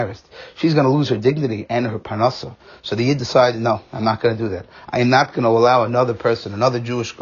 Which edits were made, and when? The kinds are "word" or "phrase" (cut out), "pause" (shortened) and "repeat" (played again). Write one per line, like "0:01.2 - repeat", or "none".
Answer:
none

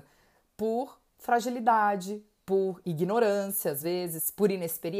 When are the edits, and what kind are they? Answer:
none

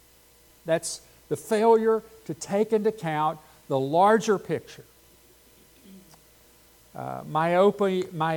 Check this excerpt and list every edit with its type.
none

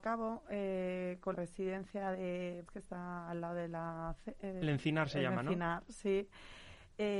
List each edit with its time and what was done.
0:01.3 - word
0:02.7 - word
0:04.6 - word

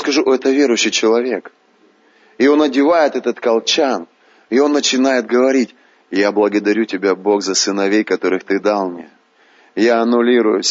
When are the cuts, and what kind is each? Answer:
none

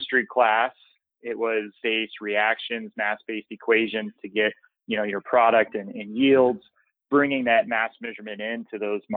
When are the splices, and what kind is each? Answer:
0:01.8 - word

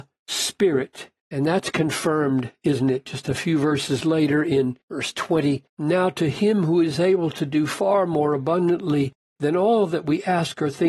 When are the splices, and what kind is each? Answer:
0:01.2 - pause
0:04.8 - pause
0:05.7 - pause

